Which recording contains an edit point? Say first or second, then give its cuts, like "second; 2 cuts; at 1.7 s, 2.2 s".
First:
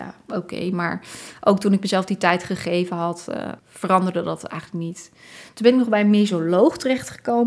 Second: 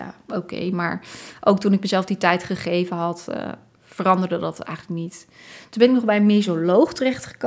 first; 1 cut; at 3.6 s